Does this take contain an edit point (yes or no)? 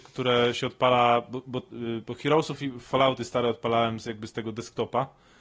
no